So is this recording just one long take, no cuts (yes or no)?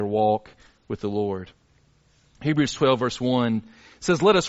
yes